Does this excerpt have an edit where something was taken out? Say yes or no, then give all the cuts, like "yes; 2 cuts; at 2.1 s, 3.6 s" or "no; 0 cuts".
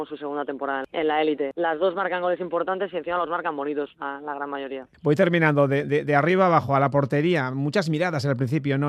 no; 0 cuts